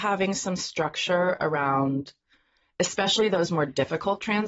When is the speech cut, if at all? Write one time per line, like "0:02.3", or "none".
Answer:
none